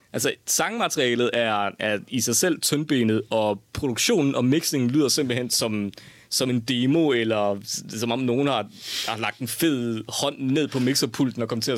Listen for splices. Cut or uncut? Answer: uncut